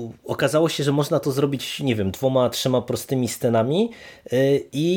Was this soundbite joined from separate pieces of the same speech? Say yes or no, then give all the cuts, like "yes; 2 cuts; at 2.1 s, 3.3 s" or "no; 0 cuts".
no; 0 cuts